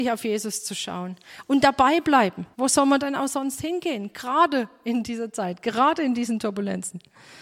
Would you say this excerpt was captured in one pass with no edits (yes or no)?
no